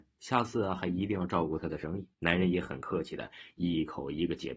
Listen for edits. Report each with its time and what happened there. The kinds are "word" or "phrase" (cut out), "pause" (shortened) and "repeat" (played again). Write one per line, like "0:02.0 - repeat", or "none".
0:02.1 - pause